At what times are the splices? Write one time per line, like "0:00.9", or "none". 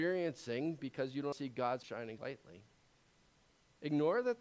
0:01.3
0:01.8
0:02.2